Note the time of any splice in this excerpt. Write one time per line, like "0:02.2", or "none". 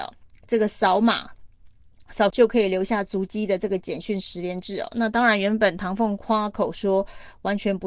0:02.3

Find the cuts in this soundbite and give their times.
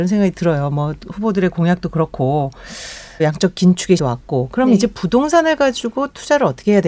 0:03.2
0:04.0

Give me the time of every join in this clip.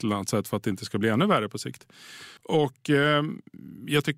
0:02.4

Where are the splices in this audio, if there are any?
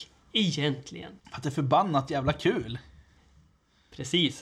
0:01.2

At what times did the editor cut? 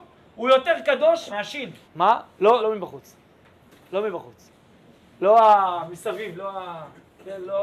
0:01.3
0:01.8
0:02.6

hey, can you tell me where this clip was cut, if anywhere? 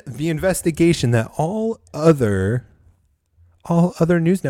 none

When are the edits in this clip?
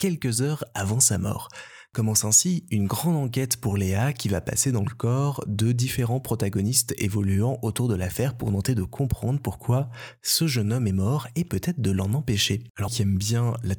0:12.9

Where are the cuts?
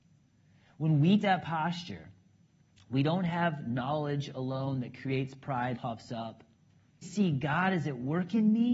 0:01.2
0:05.7
0:07.0

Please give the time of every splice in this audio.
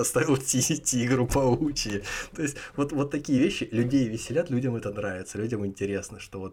none

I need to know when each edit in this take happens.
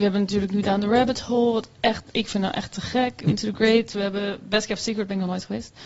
0:03.3

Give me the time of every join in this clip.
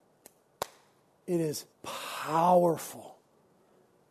0:01.7

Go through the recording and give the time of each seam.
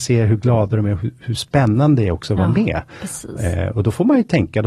none

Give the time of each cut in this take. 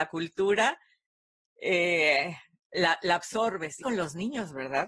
0:03.8

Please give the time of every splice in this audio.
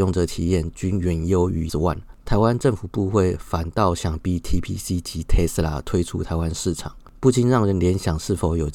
0:01.7

